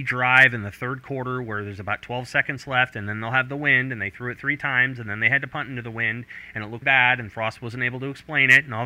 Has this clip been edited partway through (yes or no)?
yes